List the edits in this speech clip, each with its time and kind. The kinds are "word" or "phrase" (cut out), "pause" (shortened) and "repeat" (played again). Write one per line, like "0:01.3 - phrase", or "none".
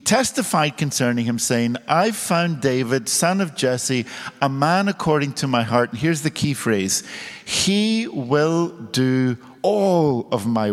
0:09.6 - pause